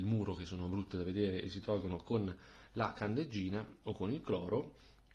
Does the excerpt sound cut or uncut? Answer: uncut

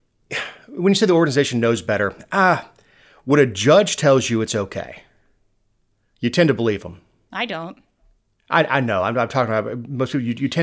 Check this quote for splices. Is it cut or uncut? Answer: uncut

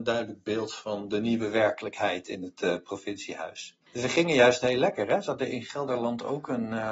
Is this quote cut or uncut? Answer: cut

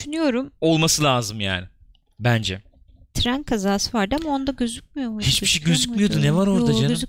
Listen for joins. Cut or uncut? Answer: uncut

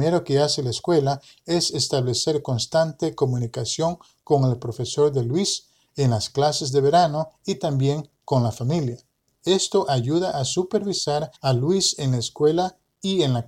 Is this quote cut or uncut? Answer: cut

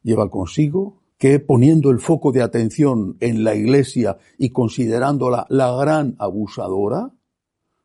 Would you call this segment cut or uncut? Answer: cut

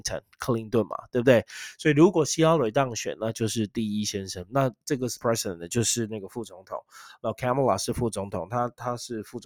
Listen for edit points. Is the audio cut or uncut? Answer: cut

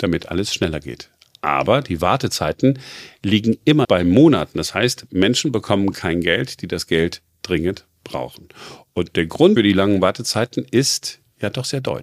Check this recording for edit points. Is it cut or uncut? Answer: cut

